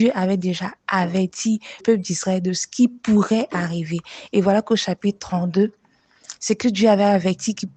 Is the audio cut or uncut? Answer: cut